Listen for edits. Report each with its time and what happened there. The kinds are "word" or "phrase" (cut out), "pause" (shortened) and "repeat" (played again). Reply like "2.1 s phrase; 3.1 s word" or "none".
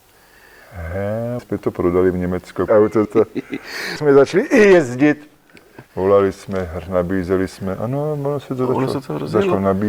1.4 s word; 2.7 s phrase; 3.0 s word; 4.0 s word; 5.9 s pause